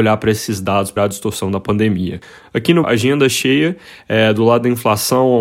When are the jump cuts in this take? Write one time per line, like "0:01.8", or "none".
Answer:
0:01.0
0:02.8